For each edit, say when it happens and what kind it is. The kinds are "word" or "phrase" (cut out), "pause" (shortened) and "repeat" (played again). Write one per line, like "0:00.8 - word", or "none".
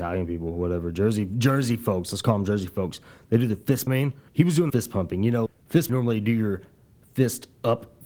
0:03.9 - phrase
0:04.3 - pause
0:04.7 - phrase
0:05.5 - word
0:05.9 - phrase